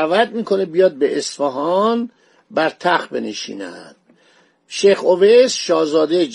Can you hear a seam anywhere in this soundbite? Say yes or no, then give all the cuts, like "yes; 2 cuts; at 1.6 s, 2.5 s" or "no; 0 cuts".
no; 0 cuts